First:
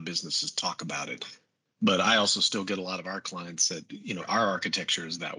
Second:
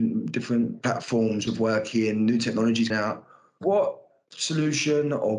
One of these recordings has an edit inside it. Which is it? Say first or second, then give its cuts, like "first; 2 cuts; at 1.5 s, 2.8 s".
second; 2 cuts; at 1.5 s, 2.9 s